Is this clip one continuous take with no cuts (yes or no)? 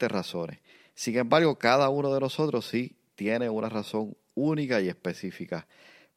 yes